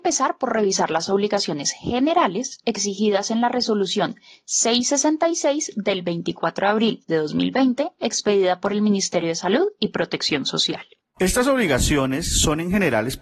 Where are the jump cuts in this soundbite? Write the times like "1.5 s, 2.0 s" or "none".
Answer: none